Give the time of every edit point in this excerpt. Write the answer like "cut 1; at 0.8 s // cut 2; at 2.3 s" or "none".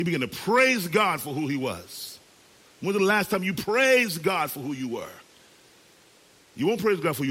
none